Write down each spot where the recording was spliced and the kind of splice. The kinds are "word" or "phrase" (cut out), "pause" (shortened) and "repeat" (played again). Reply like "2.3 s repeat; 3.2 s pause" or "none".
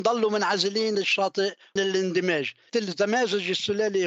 0.9 s word; 1.8 s word; 2.7 s word